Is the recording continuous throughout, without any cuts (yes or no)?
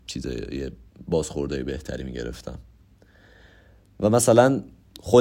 yes